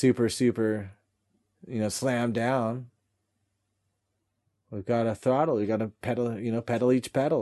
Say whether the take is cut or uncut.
uncut